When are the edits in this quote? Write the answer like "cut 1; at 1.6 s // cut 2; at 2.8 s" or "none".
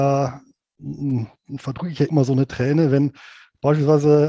cut 1; at 2.1 s

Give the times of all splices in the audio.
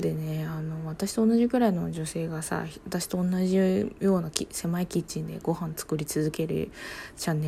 none

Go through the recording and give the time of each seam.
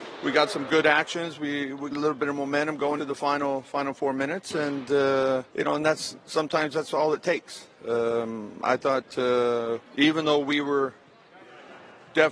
cut 1; at 1.9 s // cut 2; at 3.0 s // cut 3; at 5.5 s // cut 4; at 9.9 s

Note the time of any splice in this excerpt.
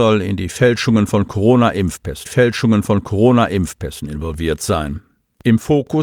cut 1; at 2.2 s

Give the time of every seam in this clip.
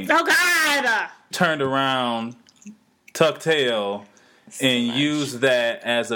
cut 1; at 1.3 s

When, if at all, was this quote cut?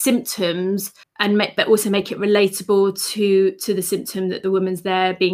cut 1; at 1.0 s

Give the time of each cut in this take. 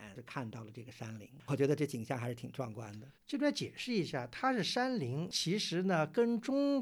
cut 1; at 3.1 s

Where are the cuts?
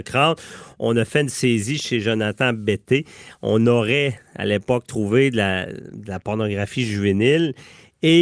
none

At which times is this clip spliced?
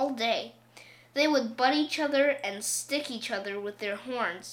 none

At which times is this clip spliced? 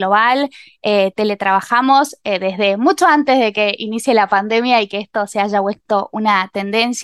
none

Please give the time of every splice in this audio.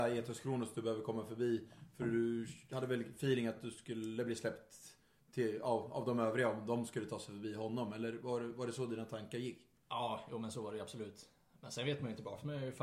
none

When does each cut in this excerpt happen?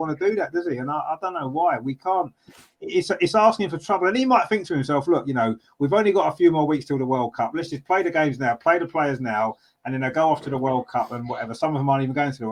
none

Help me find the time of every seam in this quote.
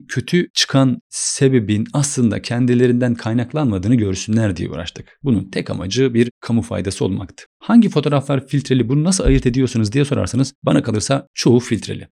none

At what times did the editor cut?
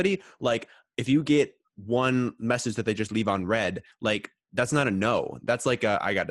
none

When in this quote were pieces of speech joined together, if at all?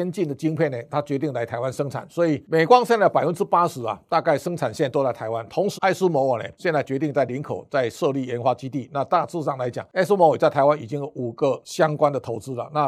cut 1; at 5.7 s

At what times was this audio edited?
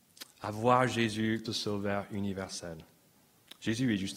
cut 1; at 1.5 s

